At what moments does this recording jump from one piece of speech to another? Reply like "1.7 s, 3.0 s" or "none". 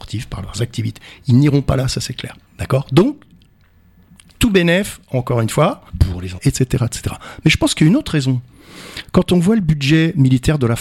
2.5 s, 5.9 s, 6.4 s